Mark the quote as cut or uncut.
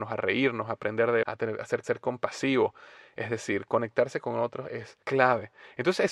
cut